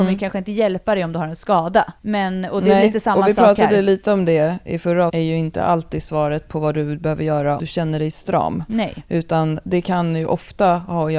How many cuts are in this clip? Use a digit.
3